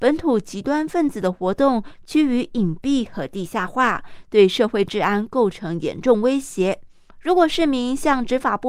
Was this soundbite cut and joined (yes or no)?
no